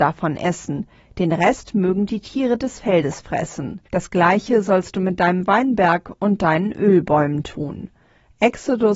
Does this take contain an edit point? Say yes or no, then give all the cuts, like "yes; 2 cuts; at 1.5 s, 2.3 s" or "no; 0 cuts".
yes; 1 cut; at 3.9 s